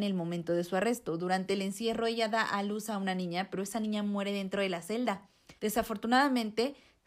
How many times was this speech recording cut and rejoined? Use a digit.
1